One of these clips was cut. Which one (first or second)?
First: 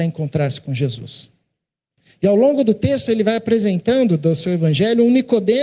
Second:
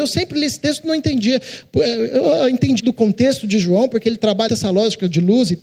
second